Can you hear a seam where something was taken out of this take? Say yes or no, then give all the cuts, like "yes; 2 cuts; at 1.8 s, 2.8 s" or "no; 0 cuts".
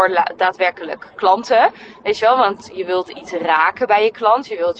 no; 0 cuts